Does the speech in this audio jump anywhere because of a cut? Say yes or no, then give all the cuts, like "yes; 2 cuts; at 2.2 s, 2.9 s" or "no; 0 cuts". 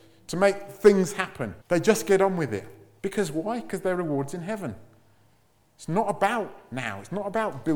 yes; 1 cut; at 1.6 s